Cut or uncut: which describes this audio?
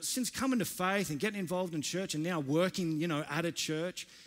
uncut